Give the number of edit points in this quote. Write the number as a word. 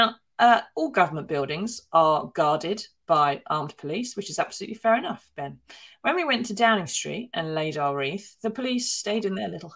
zero